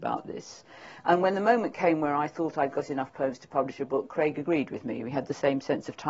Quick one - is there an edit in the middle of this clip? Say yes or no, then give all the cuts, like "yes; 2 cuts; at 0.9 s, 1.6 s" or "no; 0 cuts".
no; 0 cuts